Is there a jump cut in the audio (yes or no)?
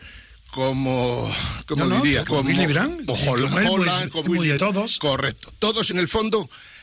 yes